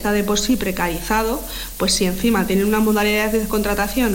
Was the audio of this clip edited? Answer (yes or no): no